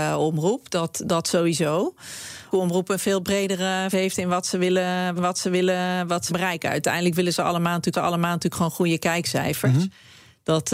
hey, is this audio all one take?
no; 5 cuts; at 2.5 s, 3.9 s, 5.2 s, 6.3 s, 7.9 s

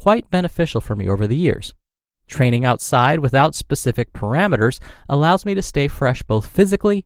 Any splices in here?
no; 0 cuts

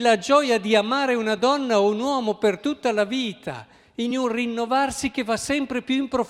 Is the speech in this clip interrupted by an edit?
no; 0 cuts

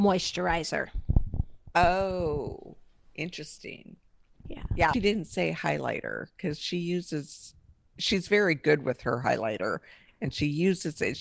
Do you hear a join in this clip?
yes; 1 cut; at 4.9 s

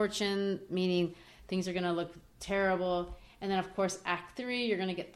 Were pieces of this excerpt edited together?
no; 0 cuts

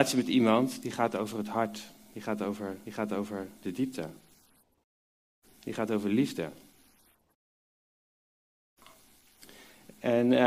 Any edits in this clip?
yes; 1 cut; at 2.9 s

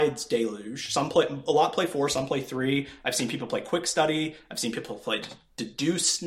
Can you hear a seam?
no; 0 cuts

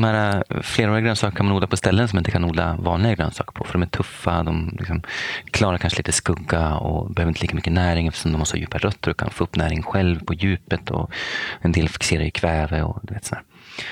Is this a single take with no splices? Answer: yes; 0 cuts

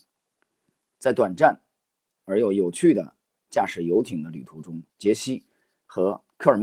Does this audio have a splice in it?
yes; 1 cut; at 4.9 s

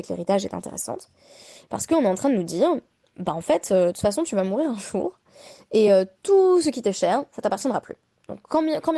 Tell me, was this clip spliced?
no; 0 cuts

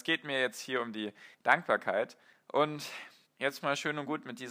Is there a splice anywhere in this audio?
yes; 2 cuts; at 1.3 s, 3.3 s

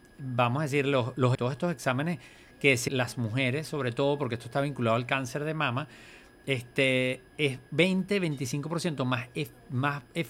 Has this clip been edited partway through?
yes; 3 cuts; at 1.3 s, 2.9 s, 7.3 s

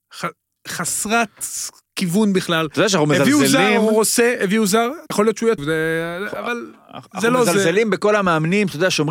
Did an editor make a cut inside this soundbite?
yes; 2 cuts; at 5.1 s, 5.6 s

